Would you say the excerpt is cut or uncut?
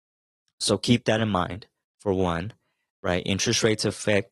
uncut